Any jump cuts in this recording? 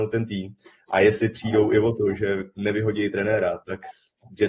no; 0 cuts

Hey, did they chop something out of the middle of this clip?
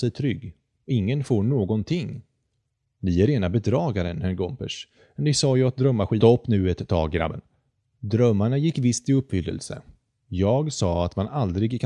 no; 0 cuts

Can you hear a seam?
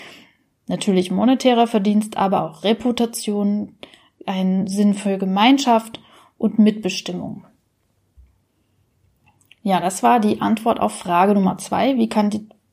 no; 0 cuts

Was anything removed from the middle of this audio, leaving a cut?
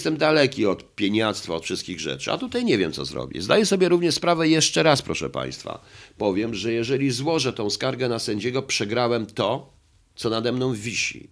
no; 0 cuts

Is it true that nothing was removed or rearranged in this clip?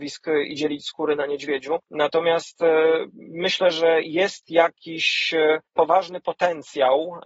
no; 2 cuts; at 1.8 s, 5.7 s

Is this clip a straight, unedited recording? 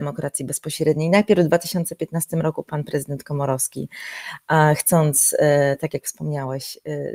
yes; 0 cuts

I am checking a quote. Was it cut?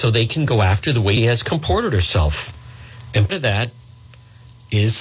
yes; 2 cuts; at 1.2 s, 3.3 s

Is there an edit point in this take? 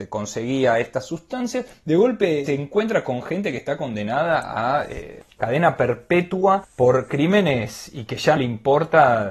yes; 2 cuts; at 2.5 s, 8.4 s

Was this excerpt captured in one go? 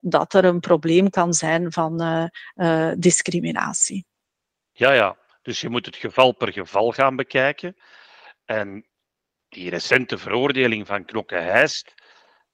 yes; 0 cuts

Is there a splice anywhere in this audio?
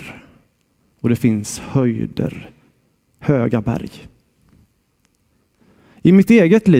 no; 0 cuts

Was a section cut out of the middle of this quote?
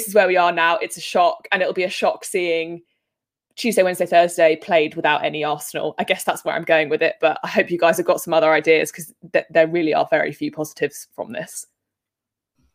no; 0 cuts

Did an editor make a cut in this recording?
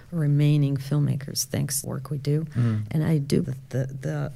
yes; 2 cuts; at 1.8 s, 3.4 s

